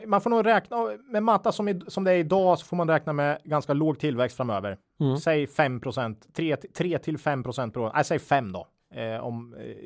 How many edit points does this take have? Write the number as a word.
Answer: one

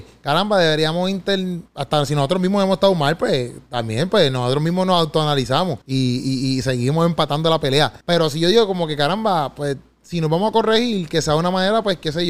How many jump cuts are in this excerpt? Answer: three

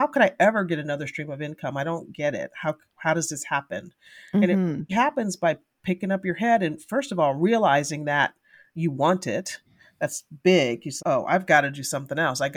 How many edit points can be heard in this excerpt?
two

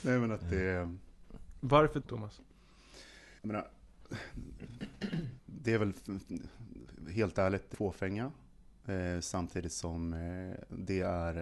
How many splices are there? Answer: four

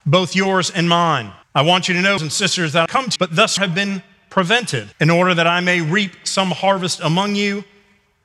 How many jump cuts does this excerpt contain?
six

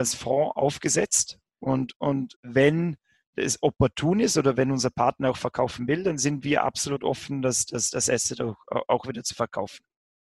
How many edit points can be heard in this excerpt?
one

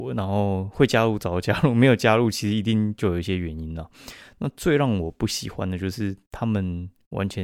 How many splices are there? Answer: zero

